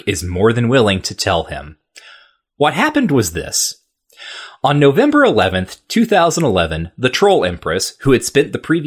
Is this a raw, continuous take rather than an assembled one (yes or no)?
yes